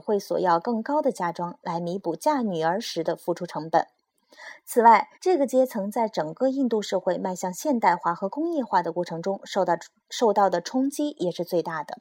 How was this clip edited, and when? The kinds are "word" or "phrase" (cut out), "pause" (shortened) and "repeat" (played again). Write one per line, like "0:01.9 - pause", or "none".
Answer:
0:05.1 - pause